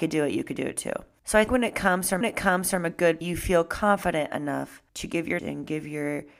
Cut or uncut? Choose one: cut